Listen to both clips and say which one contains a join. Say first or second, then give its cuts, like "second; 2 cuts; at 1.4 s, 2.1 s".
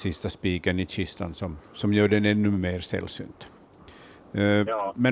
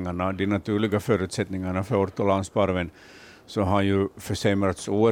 first; 1 cut; at 1.7 s